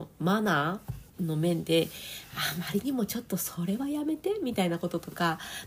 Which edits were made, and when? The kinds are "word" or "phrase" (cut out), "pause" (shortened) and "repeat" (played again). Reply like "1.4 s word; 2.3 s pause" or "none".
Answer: 1.1 s pause